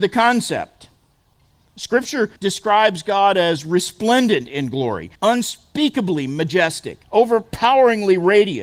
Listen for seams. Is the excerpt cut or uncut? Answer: cut